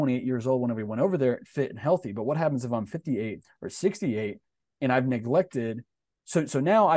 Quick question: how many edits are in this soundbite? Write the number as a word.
zero